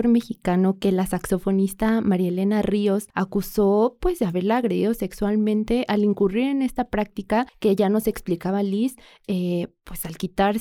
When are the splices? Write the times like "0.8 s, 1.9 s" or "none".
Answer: none